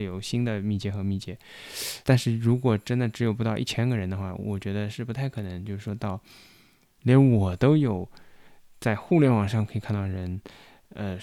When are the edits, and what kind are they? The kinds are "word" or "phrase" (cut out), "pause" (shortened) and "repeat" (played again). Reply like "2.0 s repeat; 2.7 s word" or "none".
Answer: 2.0 s pause